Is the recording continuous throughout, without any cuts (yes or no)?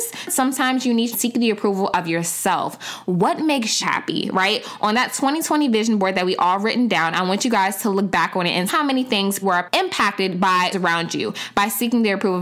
no